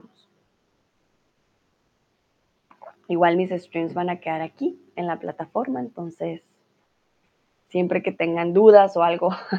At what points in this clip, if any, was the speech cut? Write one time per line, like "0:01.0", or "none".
none

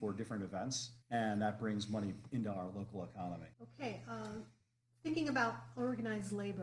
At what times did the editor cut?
0:01.0
0:03.5

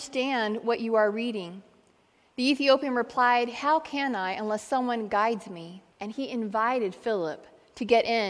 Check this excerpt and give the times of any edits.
0:05.9

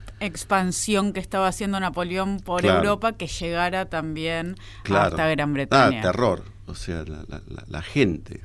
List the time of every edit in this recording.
none

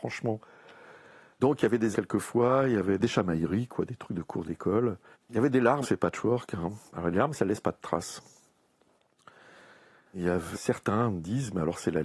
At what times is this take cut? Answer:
0:01.9
0:05.1
0:05.8
0:06.9
0:10.5

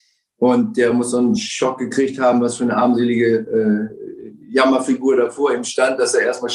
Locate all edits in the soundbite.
none

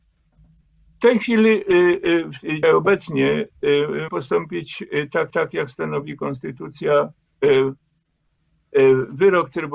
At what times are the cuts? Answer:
0:02.6
0:04.1
0:05.3

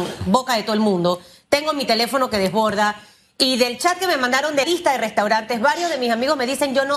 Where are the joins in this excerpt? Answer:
0:04.6

